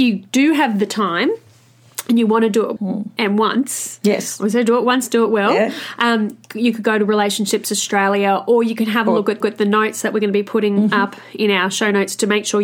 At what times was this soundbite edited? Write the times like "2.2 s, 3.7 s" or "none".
2.8 s, 6.4 s, 9.4 s